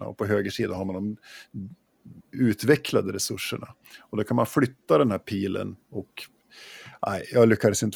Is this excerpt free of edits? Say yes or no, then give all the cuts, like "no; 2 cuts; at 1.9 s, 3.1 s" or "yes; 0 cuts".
no; 2 cuts; at 2.2 s, 5.8 s